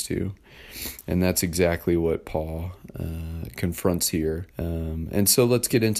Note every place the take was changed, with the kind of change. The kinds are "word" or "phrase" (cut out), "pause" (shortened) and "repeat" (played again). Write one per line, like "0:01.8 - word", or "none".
0:04.5 - pause